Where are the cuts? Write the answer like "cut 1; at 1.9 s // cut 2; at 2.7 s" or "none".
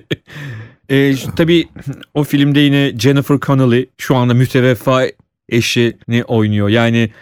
cut 1; at 3.9 s // cut 2; at 6.0 s